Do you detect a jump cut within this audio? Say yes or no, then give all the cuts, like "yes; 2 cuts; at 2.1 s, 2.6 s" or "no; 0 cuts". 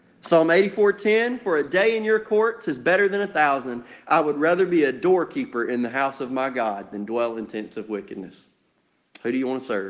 no; 0 cuts